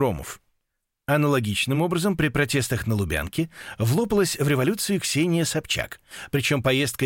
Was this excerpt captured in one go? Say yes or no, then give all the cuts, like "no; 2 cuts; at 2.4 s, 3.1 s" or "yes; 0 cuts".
yes; 0 cuts